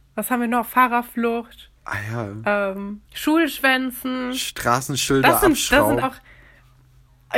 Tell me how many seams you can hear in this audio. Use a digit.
3